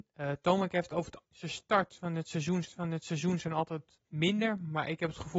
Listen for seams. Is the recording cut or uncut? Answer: cut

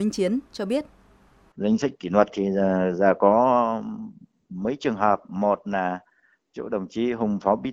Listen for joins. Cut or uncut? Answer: uncut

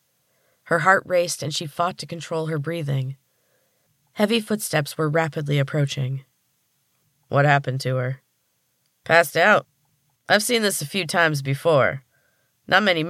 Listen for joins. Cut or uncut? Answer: uncut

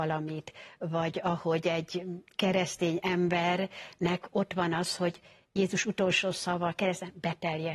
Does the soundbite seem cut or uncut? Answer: uncut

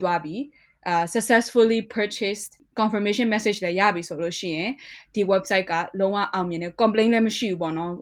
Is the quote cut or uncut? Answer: uncut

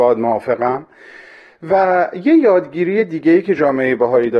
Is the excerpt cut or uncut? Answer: uncut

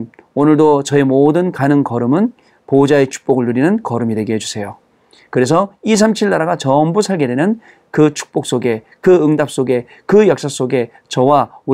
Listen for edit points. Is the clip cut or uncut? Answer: uncut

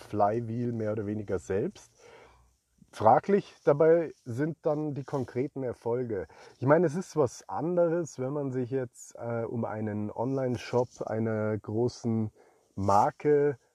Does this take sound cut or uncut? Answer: uncut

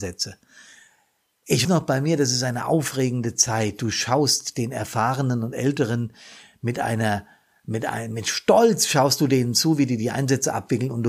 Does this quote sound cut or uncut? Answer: cut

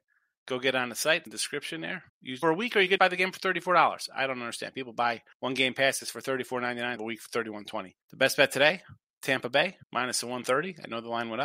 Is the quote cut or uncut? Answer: cut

